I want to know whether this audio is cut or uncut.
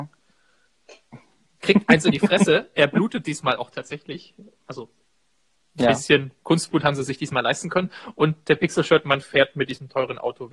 uncut